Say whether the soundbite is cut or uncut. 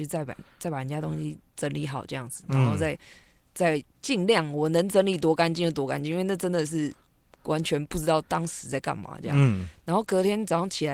uncut